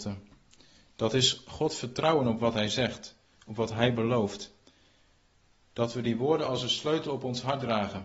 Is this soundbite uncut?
yes; 0 cuts

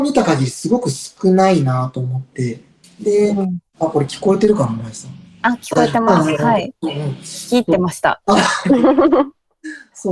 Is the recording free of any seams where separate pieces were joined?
no; 2 cuts; at 2.8 s, 3.7 s

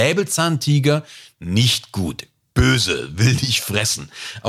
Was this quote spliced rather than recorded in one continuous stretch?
no; 0 cuts

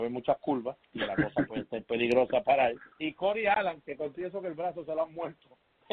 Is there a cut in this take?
yes; 1 cut; at 2.9 s

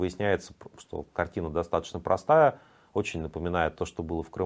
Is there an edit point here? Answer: no; 0 cuts

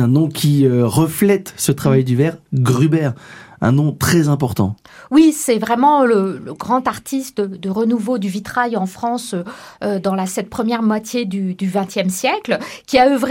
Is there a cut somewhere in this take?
no; 0 cuts

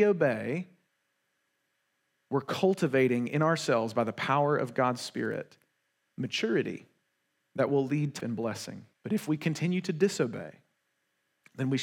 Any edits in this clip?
yes; 2 cuts; at 8.2 s, 8.9 s

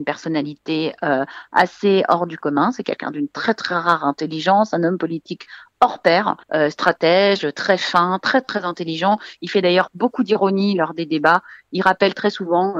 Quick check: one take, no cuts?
no; 1 cut; at 6.4 s

